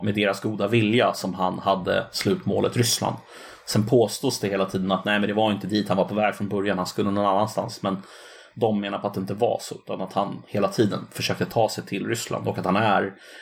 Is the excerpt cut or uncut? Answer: uncut